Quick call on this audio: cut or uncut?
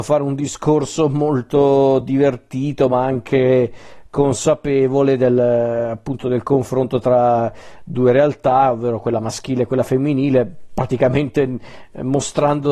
uncut